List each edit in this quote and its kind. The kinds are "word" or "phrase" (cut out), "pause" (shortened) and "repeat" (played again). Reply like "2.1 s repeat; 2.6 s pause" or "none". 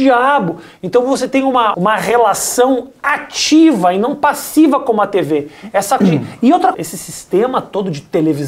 1.7 s word; 6.0 s word; 6.7 s word